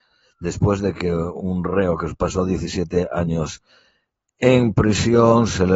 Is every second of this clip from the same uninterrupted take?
yes; 0 cuts

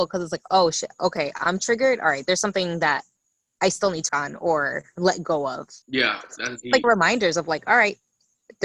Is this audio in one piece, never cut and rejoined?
no; 4 cuts; at 3.2 s, 4.1 s, 5.8 s, 6.8 s

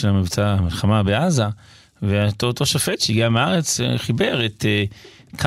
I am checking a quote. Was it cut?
no; 0 cuts

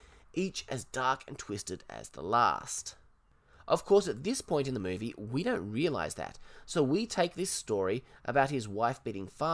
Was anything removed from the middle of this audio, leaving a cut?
no; 0 cuts

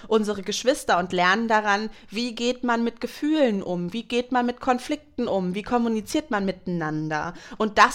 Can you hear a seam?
no; 0 cuts

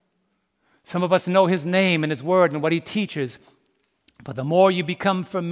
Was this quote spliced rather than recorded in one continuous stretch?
no; 0 cuts

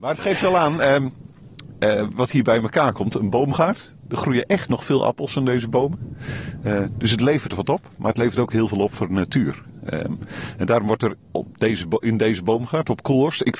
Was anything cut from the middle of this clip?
yes; 3 cuts; at 2.1 s, 4.0 s, 11.2 s

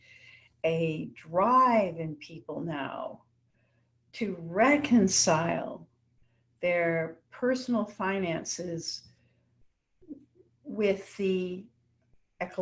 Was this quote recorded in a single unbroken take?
yes; 0 cuts

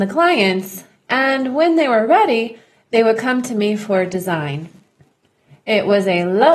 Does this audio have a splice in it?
no; 0 cuts

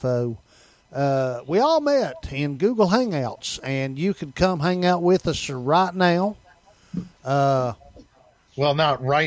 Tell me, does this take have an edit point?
no; 0 cuts

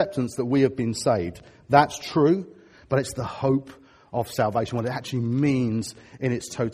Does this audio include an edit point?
no; 0 cuts

